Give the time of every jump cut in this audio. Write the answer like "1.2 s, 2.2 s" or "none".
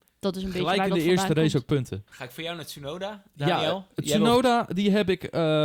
2.1 s